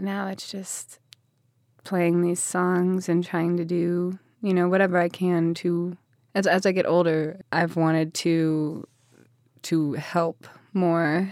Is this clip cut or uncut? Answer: uncut